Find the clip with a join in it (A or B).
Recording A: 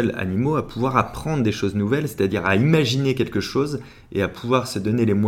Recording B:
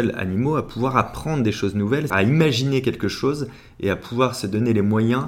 B